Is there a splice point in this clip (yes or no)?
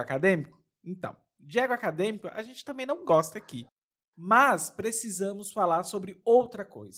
no